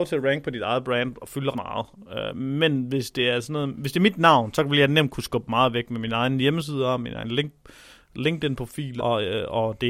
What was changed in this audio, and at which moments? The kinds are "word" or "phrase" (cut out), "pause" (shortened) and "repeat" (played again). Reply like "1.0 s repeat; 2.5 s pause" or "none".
1.5 s word; 9.0 s word